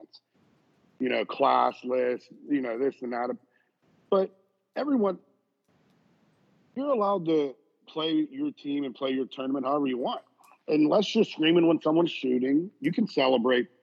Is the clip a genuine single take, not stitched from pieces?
yes; 0 cuts

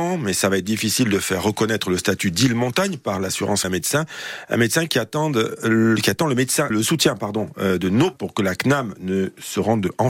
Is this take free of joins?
no; 3 cuts; at 3.6 s, 6.7 s, 8.1 s

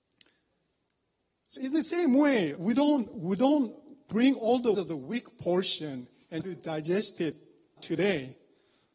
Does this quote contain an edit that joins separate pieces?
yes; 5 cuts; at 1.6 s, 2.6 s, 4.7 s, 6.4 s, 7.8 s

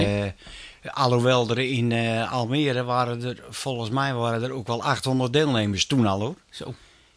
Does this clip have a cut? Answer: no; 0 cuts

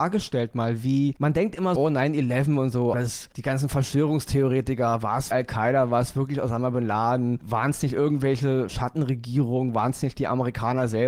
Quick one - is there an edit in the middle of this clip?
yes; 4 cuts; at 1.8 s, 2.9 s, 5.3 s, 8.7 s

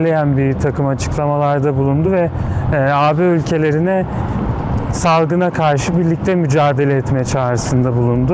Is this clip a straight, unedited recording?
yes; 0 cuts

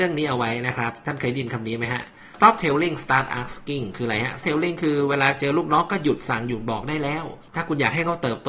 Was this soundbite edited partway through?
yes; 3 cuts; at 2.3 s, 4.4 s, 7.5 s

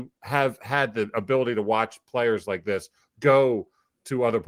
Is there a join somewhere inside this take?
no; 0 cuts

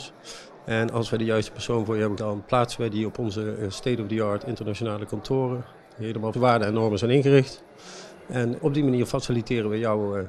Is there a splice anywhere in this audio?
yes; 3 cuts; at 2.2 s, 6.3 s, 8.6 s

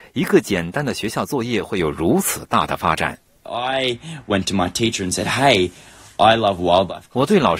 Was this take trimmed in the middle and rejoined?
no; 0 cuts

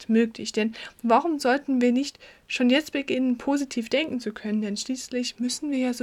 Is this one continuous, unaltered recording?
yes; 0 cuts

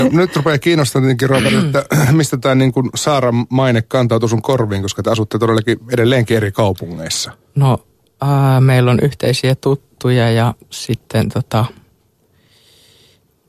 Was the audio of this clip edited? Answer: no; 0 cuts

